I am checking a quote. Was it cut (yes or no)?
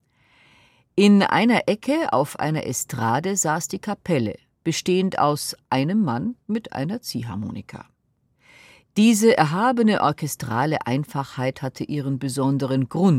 no